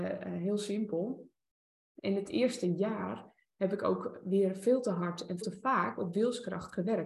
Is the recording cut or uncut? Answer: cut